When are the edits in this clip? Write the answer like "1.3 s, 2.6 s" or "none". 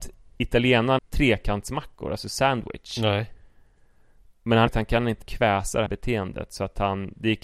1.0 s, 4.7 s, 5.2 s, 5.9 s